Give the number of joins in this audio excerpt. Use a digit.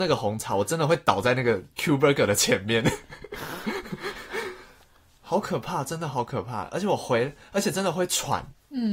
1